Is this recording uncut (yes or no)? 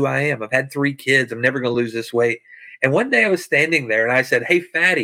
yes